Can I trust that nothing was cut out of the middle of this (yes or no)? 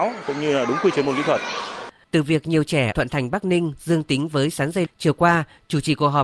no